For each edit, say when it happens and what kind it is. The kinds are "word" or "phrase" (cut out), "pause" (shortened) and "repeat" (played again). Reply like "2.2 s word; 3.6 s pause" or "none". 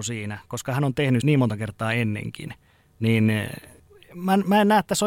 1.2 s word; 3.8 s pause

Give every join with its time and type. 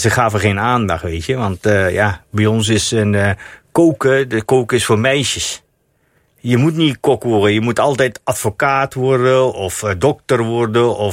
none

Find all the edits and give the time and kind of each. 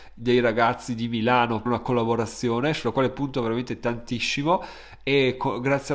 1.7 s word

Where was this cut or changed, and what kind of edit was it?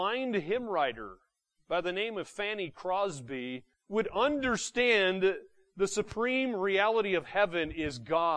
3.7 s pause

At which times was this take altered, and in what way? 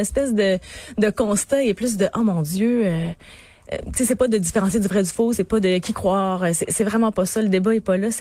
none

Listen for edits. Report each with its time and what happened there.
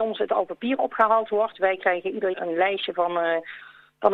2.3 s word

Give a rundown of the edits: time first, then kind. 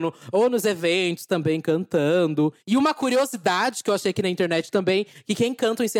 2.6 s pause

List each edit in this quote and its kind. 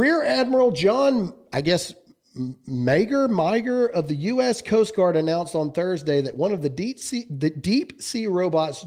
none

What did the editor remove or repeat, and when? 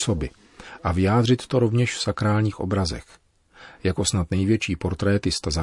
none

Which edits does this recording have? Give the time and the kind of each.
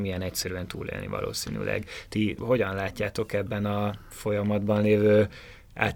2.4 s word

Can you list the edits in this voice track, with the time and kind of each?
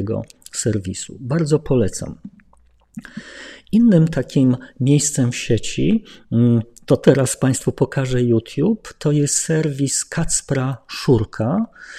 none

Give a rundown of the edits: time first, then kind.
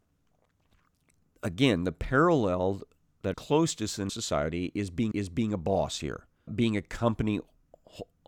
3.3 s word; 4.1 s word; 5.1 s repeat; 6.5 s word

